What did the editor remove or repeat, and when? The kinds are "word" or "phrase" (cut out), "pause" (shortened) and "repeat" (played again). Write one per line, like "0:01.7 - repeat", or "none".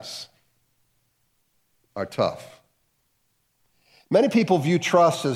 none